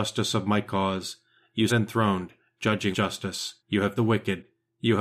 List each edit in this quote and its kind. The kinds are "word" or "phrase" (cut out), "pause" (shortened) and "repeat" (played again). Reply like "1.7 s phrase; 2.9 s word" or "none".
1.7 s word; 2.9 s word; 3.6 s pause; 4.0 s phrase